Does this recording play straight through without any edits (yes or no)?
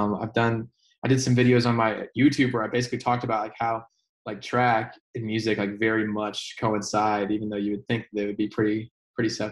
yes